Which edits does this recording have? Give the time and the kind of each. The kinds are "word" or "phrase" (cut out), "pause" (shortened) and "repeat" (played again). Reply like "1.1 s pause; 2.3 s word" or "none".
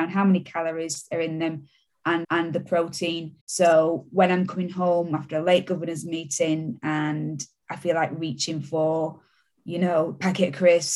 2.2 s repeat; 3.4 s pause